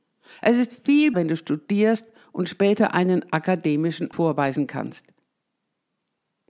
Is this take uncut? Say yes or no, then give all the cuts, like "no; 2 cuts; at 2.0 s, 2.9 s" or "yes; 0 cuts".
no; 2 cuts; at 1.1 s, 4.1 s